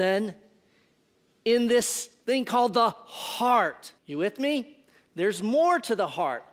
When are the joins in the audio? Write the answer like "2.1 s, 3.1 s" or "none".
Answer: 4.0 s